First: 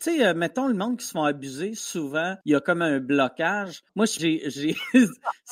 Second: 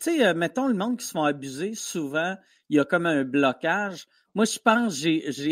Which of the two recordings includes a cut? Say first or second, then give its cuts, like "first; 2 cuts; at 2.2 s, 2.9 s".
first; 3 cuts; at 2.4 s, 3.9 s, 4.2 s